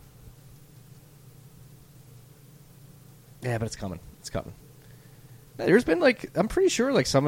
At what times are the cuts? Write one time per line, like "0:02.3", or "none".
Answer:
none